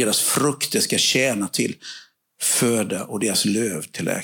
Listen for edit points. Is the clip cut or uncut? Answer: cut